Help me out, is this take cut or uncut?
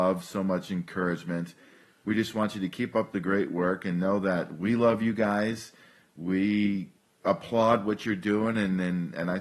uncut